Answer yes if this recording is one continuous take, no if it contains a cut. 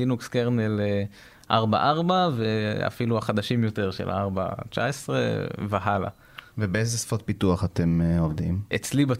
yes